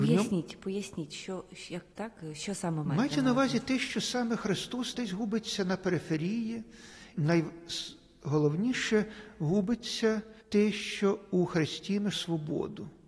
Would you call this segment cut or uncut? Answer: cut